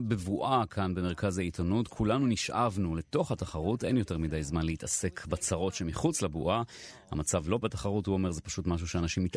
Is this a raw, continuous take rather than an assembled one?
no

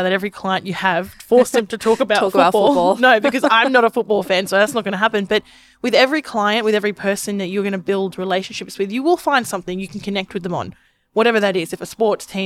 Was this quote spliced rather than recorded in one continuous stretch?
no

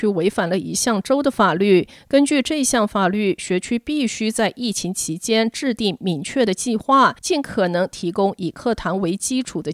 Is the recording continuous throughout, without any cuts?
no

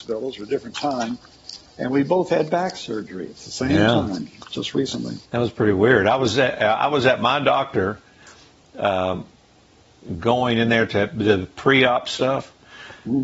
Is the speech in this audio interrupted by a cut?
yes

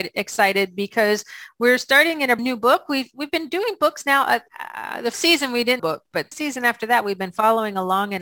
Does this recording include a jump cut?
yes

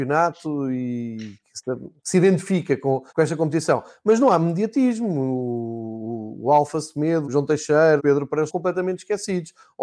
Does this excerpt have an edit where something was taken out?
yes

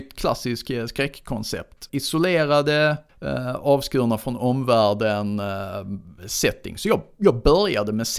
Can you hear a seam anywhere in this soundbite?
no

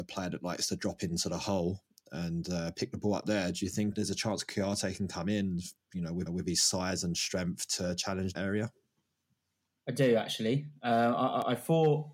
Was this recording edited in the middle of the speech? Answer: yes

